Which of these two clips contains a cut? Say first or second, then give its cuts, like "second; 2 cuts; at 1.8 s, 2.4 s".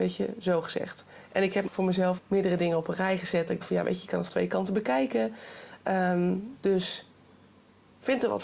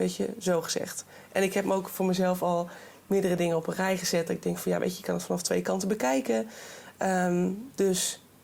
first; 4 cuts; at 1.7 s, 2.2 s, 3.6 s, 4.3 s